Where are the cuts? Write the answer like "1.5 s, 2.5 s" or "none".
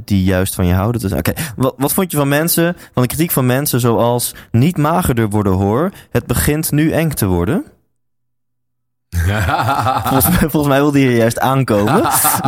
none